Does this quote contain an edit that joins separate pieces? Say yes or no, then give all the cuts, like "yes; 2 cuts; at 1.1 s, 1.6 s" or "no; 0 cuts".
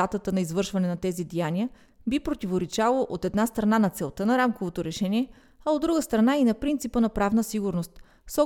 no; 0 cuts